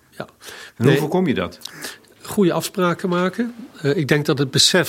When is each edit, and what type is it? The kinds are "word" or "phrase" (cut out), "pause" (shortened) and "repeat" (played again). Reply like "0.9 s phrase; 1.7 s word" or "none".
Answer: none